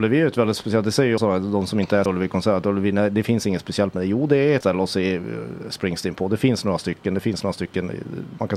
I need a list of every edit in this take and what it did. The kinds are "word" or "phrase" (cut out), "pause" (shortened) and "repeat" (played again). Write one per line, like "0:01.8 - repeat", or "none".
0:01.2 - word
0:02.1 - word
0:04.6 - word